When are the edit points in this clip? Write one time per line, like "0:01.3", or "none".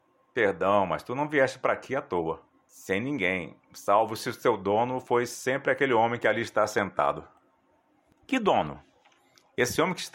none